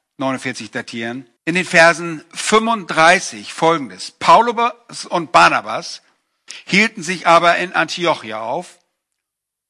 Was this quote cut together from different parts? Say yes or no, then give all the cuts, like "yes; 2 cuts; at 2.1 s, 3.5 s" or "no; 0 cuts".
yes; 1 cut; at 1.4 s